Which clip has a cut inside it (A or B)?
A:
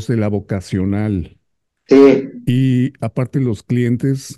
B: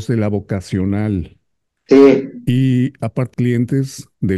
B